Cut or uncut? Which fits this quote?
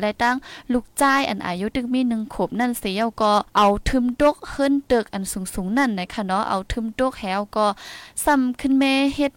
cut